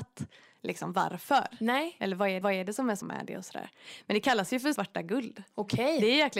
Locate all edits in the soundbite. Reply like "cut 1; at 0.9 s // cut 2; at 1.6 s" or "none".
cut 1; at 2.4 s // cut 2; at 3.0 s // cut 3; at 4.8 s